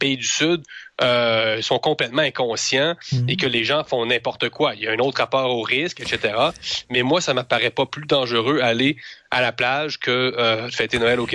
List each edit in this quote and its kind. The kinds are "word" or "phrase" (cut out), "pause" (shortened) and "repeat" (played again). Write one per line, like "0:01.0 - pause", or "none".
none